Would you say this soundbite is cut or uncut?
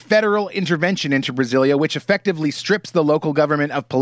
uncut